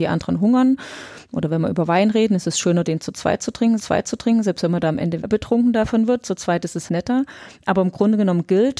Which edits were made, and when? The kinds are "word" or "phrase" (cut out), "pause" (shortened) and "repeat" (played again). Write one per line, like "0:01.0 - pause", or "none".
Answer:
0:03.8 - repeat
0:05.2 - word
0:06.9 - word